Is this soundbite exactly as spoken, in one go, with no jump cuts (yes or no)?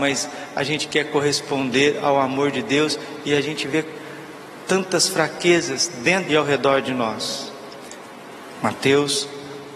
no